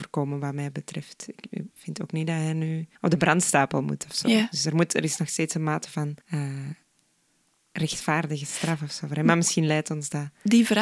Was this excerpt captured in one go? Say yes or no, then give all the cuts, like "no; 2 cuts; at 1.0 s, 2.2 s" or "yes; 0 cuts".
no; 3 cuts; at 1.7 s, 2.9 s, 6.2 s